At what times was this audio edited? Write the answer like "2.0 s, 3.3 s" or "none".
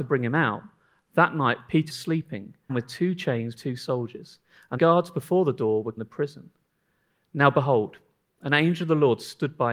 1.9 s, 2.7 s, 3.6 s, 4.8 s, 6.0 s